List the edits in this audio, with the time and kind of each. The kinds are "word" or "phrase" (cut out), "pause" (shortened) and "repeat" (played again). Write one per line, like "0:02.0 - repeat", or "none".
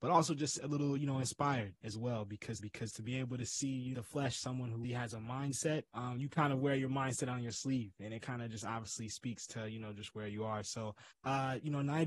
0:02.6 - repeat
0:03.9 - phrase
0:04.8 - word
0:05.9 - pause
0:11.1 - pause